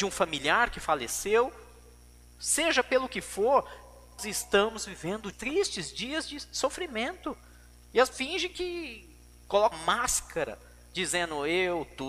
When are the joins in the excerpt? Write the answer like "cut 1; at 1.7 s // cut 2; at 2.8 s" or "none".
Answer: cut 1; at 4.2 s // cut 2; at 5.3 s // cut 3; at 8.1 s // cut 4; at 9.7 s